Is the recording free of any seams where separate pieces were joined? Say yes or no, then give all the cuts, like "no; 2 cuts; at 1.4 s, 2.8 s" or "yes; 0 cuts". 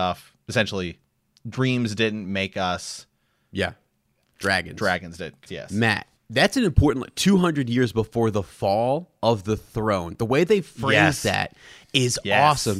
no; 3 cuts; at 5.5 s, 6.2 s, 9.2 s